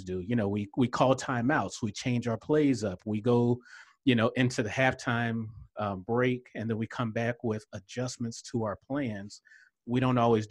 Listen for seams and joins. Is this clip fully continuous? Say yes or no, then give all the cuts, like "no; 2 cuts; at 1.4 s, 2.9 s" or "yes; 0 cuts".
yes; 0 cuts